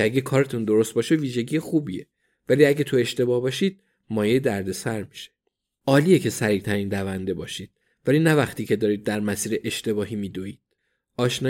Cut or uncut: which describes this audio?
uncut